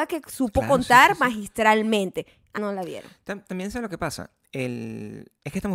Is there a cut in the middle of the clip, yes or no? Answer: yes